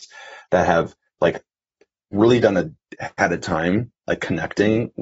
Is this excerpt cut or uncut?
cut